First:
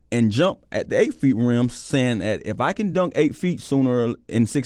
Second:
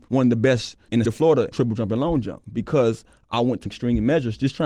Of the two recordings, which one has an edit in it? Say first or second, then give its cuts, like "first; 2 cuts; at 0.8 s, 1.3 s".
second; 3 cuts; at 1.0 s, 1.5 s, 3.7 s